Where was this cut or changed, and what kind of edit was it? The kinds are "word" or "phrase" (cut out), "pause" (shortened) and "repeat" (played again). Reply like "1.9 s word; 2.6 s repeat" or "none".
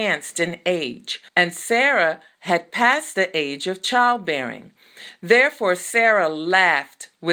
1.3 s pause